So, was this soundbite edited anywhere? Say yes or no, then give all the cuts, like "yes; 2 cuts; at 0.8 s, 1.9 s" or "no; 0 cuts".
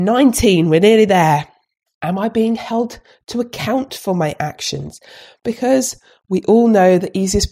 no; 0 cuts